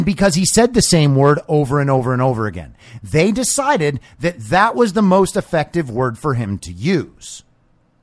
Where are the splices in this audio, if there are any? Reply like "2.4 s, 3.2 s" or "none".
none